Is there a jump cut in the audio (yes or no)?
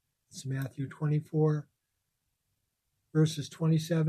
no